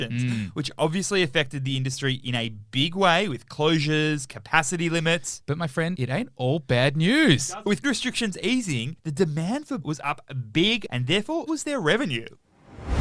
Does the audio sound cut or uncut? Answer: cut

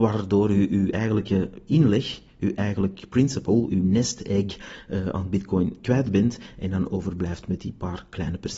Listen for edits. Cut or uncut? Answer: uncut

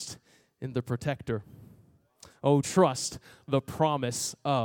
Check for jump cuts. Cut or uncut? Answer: cut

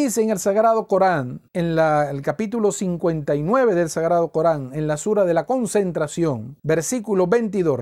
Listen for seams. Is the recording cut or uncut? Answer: cut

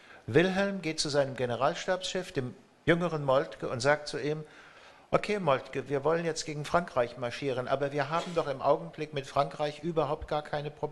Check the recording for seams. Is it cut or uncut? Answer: uncut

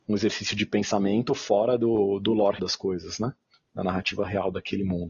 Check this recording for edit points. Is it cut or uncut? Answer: cut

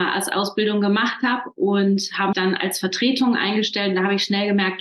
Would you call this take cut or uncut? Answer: cut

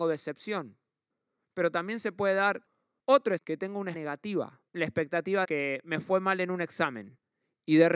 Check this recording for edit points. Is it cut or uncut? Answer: cut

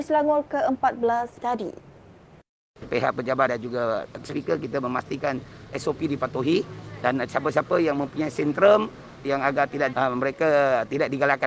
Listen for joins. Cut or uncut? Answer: cut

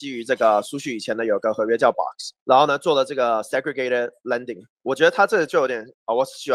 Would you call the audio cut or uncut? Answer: cut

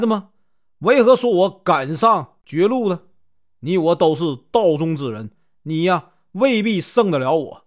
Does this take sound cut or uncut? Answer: uncut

